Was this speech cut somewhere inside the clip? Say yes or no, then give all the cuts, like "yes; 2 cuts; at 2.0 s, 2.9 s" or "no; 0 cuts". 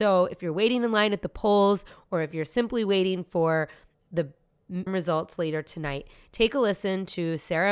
yes; 1 cut; at 4.9 s